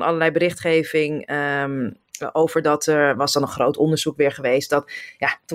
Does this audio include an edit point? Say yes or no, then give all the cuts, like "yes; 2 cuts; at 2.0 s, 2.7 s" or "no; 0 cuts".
no; 0 cuts